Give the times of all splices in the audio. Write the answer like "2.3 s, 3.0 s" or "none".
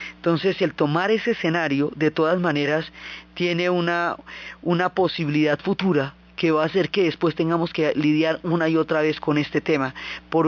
none